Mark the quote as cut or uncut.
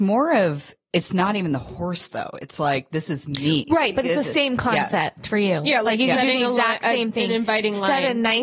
uncut